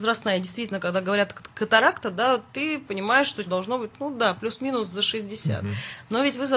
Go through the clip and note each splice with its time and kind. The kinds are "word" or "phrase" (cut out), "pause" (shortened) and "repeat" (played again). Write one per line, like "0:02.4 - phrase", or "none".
0:03.5 - phrase